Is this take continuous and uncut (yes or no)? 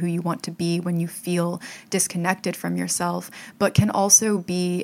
yes